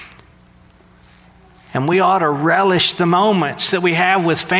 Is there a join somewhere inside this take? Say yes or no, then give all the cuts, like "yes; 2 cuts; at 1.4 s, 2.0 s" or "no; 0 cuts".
no; 0 cuts